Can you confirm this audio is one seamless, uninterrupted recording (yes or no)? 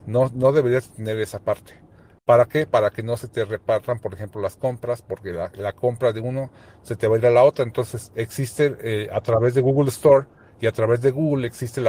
yes